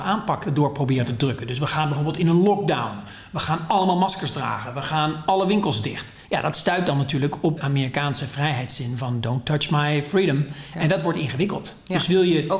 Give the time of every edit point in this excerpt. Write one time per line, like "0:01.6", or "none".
0:06.2
0:07.6